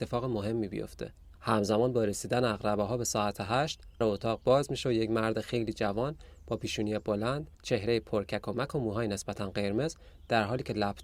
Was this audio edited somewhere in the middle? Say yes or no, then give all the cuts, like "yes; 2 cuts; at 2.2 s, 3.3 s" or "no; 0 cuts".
yes; 3 cuts; at 1.4 s, 4.0 s, 7.5 s